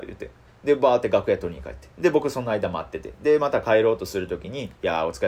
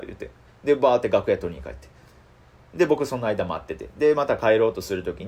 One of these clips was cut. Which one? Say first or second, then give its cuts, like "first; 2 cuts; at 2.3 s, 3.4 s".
first; 1 cut; at 1.9 s